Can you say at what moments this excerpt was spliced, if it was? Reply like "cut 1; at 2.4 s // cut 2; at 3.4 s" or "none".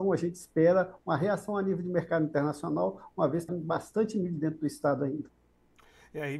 cut 1; at 3.5 s